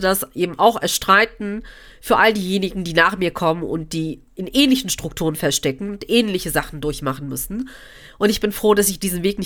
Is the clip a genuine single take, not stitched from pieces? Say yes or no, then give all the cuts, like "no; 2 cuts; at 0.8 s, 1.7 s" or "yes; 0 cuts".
yes; 0 cuts